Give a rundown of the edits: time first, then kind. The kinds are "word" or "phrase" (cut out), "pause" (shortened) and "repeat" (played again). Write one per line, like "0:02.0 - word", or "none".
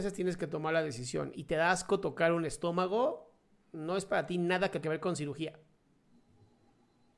0:01.3 - word
0:04.8 - word